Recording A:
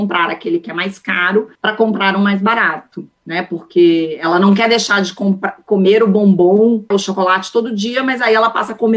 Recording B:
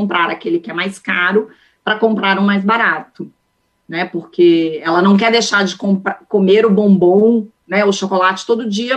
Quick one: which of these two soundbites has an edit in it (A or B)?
A